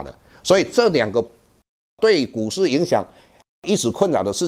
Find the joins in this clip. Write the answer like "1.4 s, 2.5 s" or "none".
none